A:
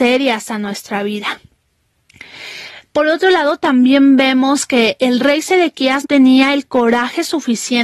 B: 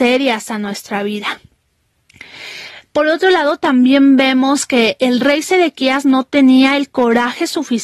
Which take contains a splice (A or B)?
A